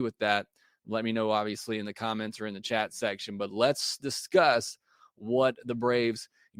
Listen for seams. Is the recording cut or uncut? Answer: uncut